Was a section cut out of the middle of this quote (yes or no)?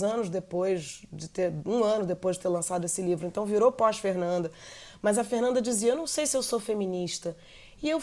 no